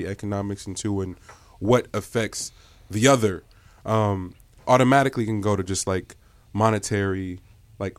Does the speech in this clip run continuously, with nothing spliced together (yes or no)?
yes